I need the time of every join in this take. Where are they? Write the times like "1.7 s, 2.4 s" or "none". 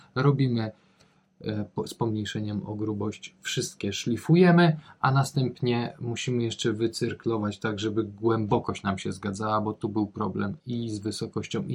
10.6 s